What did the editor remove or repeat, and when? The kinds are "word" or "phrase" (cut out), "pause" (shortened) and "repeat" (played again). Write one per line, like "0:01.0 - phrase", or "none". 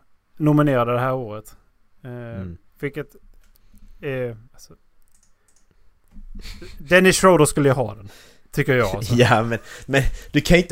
0:04.4 - pause